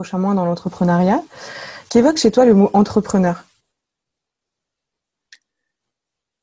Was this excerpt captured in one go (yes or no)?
yes